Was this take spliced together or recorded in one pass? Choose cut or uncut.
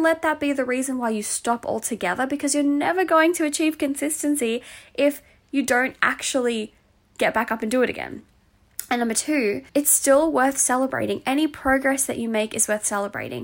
cut